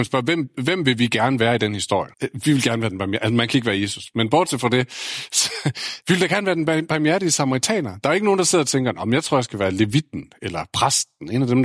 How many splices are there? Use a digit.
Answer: 1